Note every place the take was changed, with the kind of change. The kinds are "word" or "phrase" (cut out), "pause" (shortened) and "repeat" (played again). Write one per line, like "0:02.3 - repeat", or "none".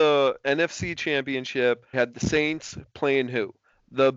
0:01.9 - word

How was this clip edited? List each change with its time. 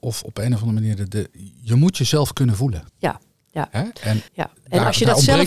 0:02.9 - pause
0:04.3 - pause

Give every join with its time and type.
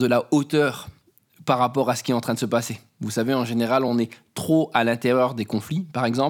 none

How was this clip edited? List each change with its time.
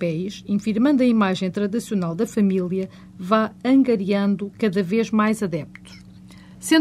none

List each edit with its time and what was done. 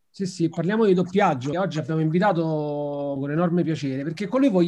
0:01.5 - word
0:03.2 - word

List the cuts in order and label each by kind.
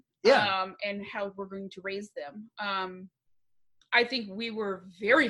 none

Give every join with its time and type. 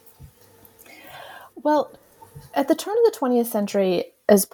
none

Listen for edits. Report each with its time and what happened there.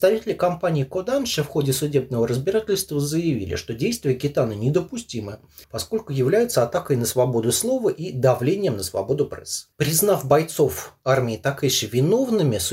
0:05.6 - pause

